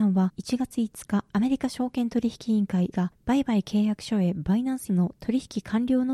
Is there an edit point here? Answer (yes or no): yes